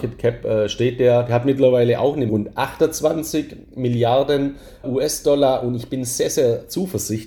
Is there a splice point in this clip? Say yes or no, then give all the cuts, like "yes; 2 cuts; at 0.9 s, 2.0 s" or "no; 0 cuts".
yes; 2 cuts; at 2.3 s, 4.8 s